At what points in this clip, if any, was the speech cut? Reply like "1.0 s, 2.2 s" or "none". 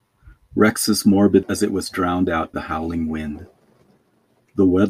1.4 s, 2.5 s